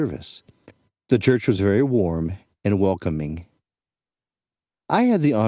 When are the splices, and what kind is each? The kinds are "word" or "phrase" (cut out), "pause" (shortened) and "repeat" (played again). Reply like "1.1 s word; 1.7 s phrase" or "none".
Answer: none